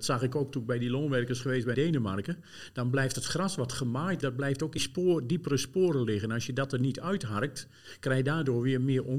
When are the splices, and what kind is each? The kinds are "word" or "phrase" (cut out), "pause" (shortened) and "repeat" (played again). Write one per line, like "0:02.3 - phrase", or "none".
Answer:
0:01.7 - word
0:04.2 - word
0:04.8 - word